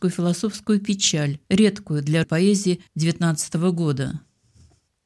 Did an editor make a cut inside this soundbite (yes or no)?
yes